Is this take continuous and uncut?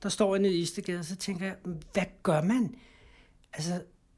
yes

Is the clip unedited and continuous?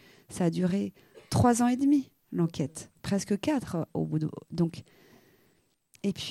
no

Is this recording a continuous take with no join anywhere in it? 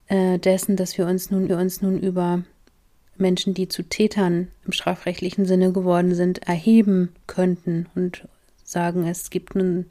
no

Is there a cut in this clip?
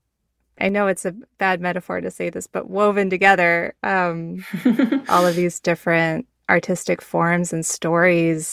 no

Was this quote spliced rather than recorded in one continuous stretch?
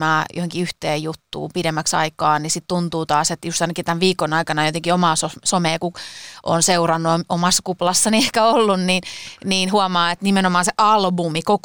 no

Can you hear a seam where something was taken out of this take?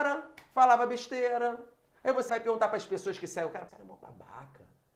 yes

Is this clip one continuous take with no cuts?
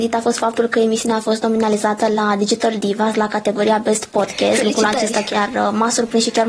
yes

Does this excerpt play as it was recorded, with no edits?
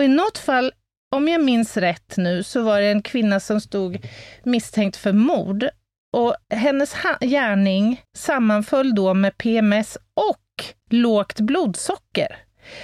no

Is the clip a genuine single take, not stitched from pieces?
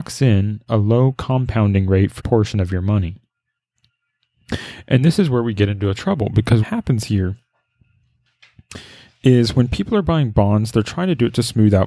no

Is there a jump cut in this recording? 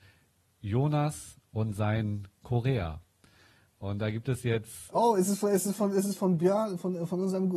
no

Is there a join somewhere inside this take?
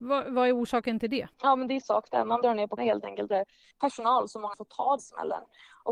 yes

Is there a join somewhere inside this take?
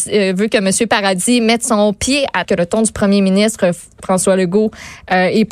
yes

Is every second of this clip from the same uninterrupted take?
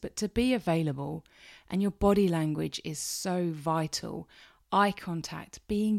yes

